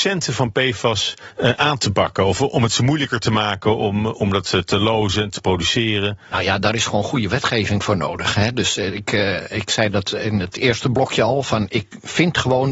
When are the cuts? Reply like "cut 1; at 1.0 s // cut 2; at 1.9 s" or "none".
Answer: none